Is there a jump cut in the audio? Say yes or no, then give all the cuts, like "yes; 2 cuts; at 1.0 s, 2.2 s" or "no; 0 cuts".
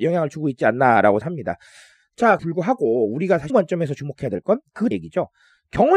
yes; 4 cuts; at 1.2 s, 2.4 s, 3.5 s, 4.9 s